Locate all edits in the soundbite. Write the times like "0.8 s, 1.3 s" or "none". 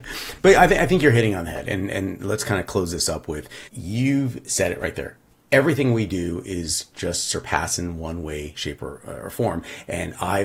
3.7 s, 5.3 s

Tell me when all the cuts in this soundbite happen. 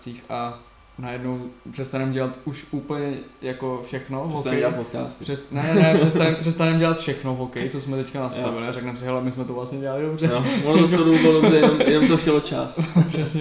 none

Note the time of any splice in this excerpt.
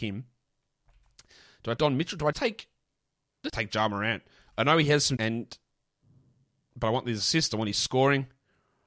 1.8 s, 2.3 s, 3.5 s, 5.2 s

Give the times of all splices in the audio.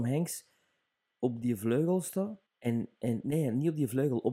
2.5 s

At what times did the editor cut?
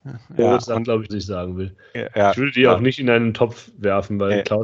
1.1 s

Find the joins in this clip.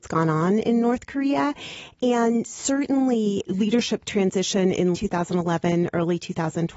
3.5 s, 4.9 s

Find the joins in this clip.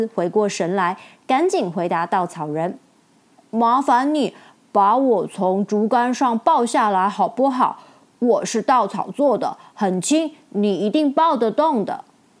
none

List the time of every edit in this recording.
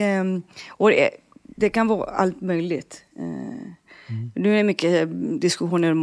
none

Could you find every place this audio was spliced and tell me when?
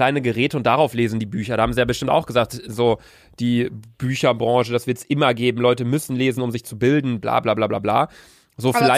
none

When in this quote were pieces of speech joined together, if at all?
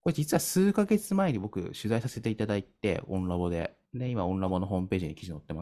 none

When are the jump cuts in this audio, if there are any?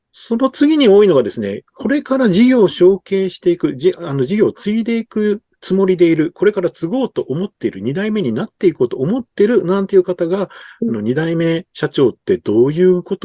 5.5 s, 11.7 s

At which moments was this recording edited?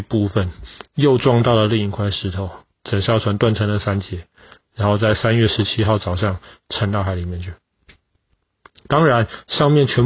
none

